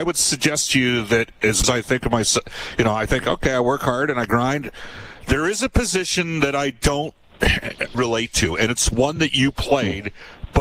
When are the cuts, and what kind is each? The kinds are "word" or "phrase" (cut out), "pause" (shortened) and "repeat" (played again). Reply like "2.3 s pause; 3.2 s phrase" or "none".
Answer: 1.6 s phrase; 7.9 s word

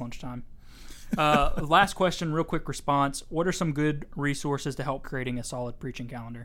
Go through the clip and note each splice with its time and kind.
5.0 s phrase

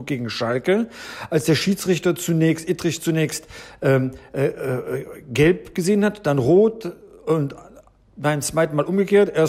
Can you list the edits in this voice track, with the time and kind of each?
none

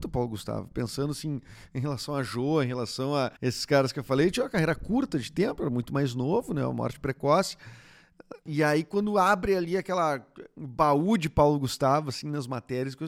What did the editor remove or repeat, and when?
3.4 s pause; 8.4 s pause

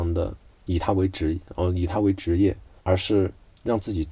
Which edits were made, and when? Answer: 2.8 s pause

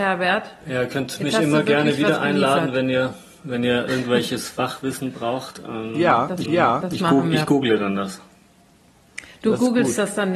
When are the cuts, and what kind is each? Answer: 6.5 s repeat

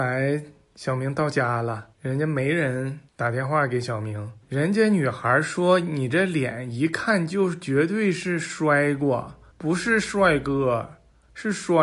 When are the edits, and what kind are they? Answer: 1.9 s pause; 3.1 s pause; 4.4 s pause; 9.5 s pause

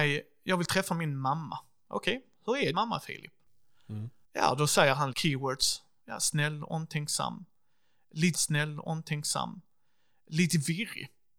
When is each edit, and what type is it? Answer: 2.7 s word; 4.2 s pause; 5.1 s word; 8.3 s repeat

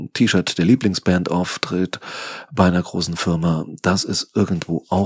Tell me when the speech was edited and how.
none

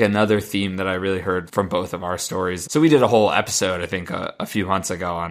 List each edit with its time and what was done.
1.5 s word; 2.7 s word

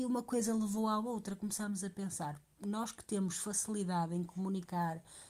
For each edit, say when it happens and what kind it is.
none

